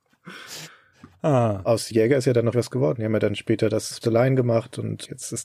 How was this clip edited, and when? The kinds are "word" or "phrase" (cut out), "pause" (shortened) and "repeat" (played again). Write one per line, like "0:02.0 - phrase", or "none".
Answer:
0:02.5 - word
0:04.0 - word